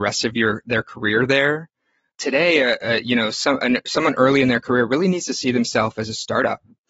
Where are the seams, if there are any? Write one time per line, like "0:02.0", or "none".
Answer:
none